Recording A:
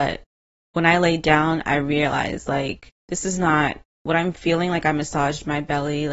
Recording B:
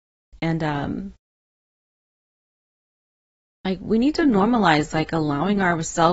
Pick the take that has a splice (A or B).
A